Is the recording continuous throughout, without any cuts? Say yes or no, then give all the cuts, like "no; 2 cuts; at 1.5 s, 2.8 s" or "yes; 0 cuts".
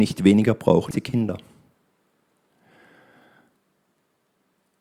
no; 1 cut; at 0.9 s